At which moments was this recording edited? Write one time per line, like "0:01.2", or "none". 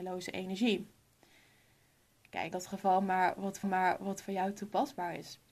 0:02.5
0:03.6